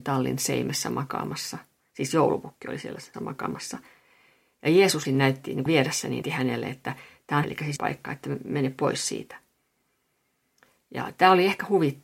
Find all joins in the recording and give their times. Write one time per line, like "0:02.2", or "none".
0:03.1
0:05.0
0:05.7
0:06.2
0:07.4
0:07.8